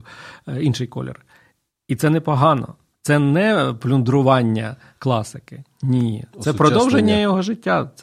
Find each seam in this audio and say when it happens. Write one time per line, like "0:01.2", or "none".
none